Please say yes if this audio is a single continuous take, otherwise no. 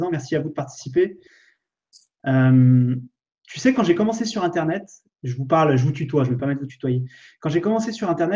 yes